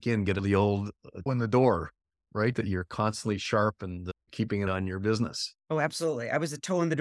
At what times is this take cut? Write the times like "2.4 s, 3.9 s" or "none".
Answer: 1.3 s, 4.2 s, 4.7 s, 5.6 s

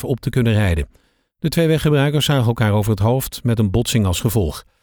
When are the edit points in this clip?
none

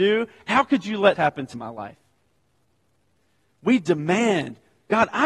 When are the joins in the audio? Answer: 1.2 s, 1.5 s

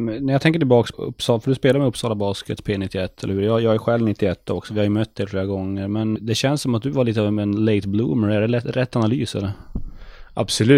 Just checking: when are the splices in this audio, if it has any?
0.9 s, 6.2 s

